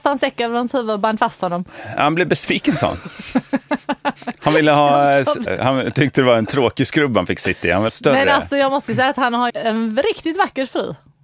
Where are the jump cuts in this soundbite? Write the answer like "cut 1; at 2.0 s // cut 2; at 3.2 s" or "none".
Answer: cut 1; at 5.5 s // cut 2; at 7.9 s // cut 3; at 9.5 s